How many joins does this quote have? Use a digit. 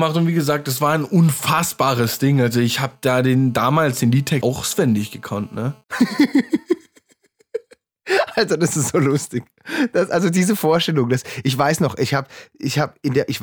2